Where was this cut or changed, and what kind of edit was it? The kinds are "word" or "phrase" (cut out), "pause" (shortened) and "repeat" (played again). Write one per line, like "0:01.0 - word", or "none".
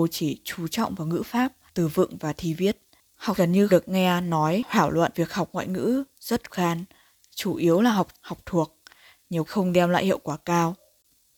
0:01.7 - pause
0:03.4 - word
0:03.7 - word
0:05.1 - word
0:06.5 - word
0:08.1 - word
0:09.5 - word